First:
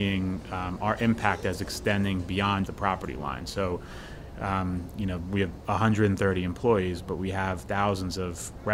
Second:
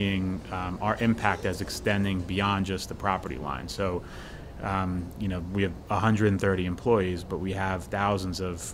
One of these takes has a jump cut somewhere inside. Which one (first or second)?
first